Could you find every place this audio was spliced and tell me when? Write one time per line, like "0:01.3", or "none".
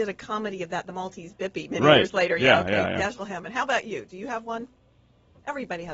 none